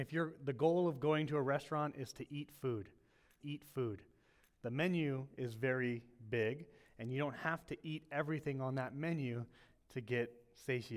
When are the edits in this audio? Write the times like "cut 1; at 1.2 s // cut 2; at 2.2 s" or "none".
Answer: cut 1; at 3.4 s